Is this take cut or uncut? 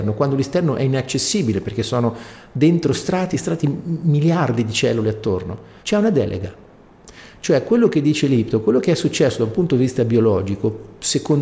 cut